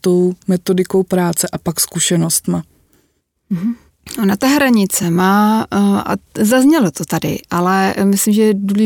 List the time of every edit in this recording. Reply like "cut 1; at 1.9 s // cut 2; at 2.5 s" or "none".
none